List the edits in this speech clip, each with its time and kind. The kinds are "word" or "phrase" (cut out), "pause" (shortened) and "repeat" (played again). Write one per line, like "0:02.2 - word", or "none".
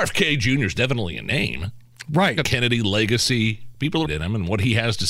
0:02.4 - word
0:04.1 - word